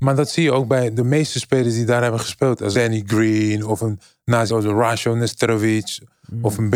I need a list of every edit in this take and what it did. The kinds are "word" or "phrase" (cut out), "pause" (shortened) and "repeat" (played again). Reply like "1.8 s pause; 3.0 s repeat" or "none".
2.7 s word; 4.5 s word